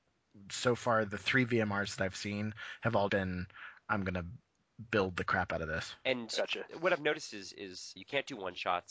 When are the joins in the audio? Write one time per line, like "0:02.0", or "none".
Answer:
0:03.1
0:08.0